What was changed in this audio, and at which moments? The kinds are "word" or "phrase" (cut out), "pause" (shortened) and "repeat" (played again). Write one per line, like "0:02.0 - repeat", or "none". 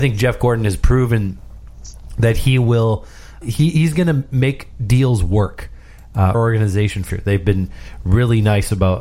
0:03.4 - word
0:06.3 - phrase
0:07.1 - phrase